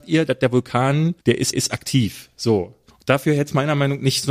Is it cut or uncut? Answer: cut